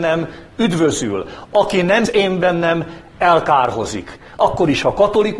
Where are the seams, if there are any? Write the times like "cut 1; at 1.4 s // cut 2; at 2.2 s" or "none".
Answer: cut 1; at 2.1 s